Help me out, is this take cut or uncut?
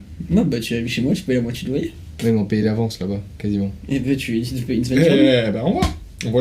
uncut